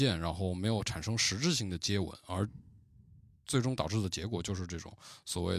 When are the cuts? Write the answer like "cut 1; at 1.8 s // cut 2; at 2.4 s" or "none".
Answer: none